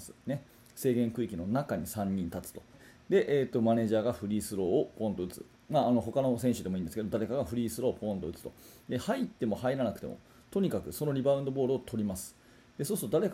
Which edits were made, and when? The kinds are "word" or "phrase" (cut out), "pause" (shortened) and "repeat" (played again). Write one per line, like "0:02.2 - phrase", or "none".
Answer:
0:02.7 - word